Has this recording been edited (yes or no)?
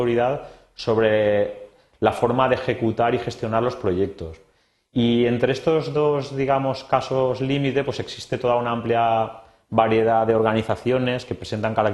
no